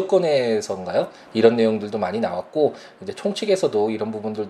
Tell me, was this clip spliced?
no; 0 cuts

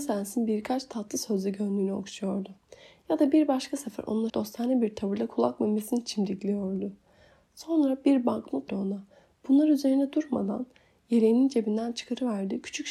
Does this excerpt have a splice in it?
yes; 2 cuts; at 4.3 s, 8.7 s

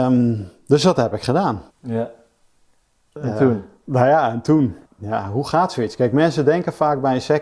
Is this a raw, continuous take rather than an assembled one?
no; 2 cuts; at 1.7 s, 4.8 s

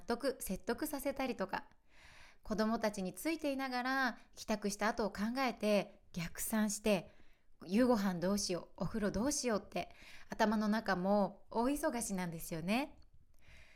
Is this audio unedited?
no; 1 cut; at 11.5 s

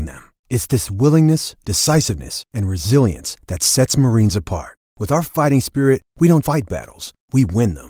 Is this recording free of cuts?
no; 1 cut; at 6.4 s

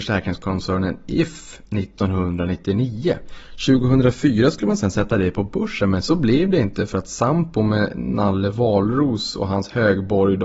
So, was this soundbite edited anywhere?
no; 0 cuts

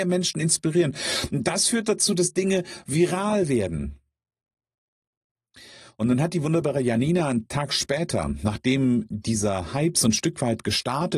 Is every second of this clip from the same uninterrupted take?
yes; 0 cuts

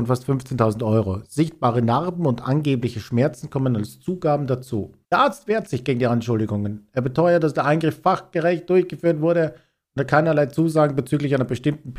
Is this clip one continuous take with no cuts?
no; 1 cut; at 5.0 s

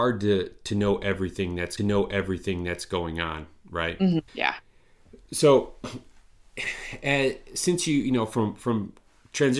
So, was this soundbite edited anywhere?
yes; 2 cuts; at 1.8 s, 4.3 s

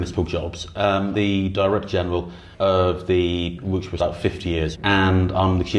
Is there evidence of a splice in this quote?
yes; 5 cuts; at 1.1 s, 2.5 s, 3.6 s, 4.0 s, 4.7 s

